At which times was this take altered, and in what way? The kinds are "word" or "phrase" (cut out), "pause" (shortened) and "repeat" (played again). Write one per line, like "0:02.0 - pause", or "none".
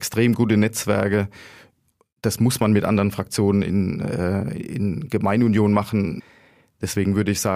none